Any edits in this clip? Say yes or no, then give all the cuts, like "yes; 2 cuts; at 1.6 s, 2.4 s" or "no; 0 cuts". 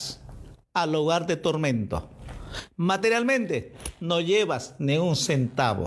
no; 0 cuts